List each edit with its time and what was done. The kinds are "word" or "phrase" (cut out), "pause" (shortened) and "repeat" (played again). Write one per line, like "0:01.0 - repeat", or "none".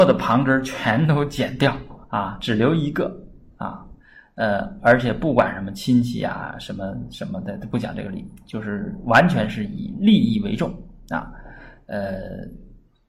0:02.0 - pause